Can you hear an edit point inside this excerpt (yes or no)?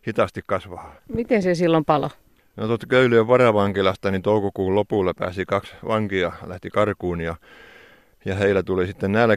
yes